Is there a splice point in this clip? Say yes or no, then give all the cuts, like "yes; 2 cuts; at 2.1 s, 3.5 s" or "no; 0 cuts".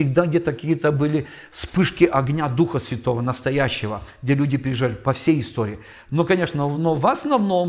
no; 0 cuts